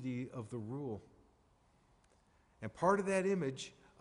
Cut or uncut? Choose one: uncut